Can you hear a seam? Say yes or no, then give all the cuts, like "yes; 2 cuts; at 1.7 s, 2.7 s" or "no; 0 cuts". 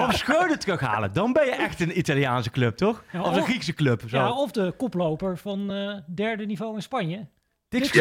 no; 0 cuts